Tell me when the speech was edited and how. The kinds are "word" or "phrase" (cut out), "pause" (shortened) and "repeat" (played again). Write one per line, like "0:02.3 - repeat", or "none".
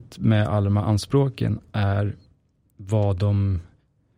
none